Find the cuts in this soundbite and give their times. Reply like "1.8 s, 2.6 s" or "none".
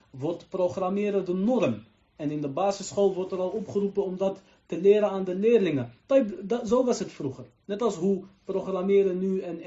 none